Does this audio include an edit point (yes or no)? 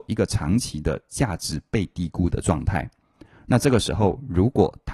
no